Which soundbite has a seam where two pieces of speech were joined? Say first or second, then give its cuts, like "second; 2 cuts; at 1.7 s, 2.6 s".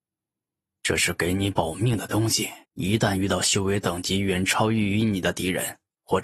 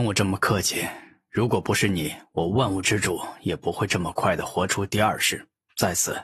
first; 1 cut; at 2.6 s